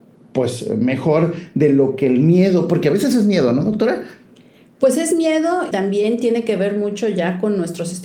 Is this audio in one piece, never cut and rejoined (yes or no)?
no